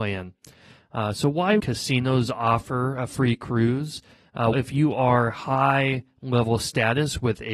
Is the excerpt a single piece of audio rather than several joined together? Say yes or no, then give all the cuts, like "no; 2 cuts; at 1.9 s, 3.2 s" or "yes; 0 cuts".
no; 2 cuts; at 1.6 s, 4.5 s